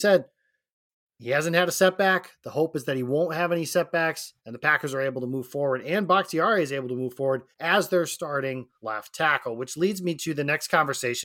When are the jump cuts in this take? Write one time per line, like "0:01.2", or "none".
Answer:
0:04.4
0:07.5
0:08.8